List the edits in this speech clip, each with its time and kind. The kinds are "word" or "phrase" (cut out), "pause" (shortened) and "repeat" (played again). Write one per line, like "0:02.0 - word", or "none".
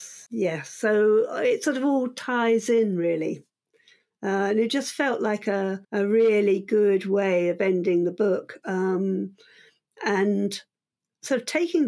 0:05.8 - pause